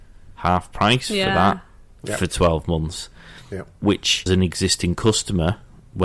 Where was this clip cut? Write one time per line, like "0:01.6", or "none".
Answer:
0:04.3